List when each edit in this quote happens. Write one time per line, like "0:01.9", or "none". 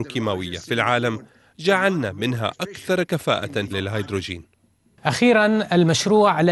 0:03.7